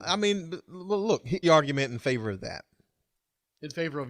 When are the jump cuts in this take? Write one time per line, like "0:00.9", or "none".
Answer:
0:01.4